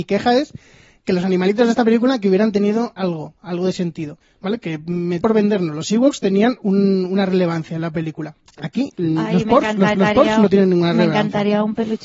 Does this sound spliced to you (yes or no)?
yes